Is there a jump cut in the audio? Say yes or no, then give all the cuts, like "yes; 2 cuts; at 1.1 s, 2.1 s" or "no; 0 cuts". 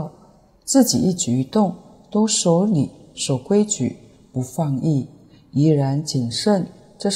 no; 0 cuts